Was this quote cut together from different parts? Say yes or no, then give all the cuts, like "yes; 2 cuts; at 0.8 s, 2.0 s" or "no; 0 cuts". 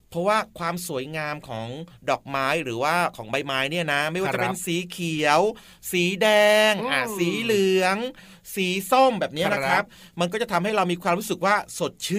no; 0 cuts